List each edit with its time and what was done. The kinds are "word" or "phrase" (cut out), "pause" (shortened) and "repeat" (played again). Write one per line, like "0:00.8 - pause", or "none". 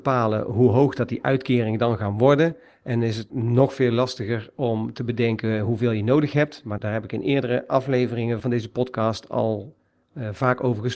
0:03.3 - word
0:06.8 - word
0:08.4 - phrase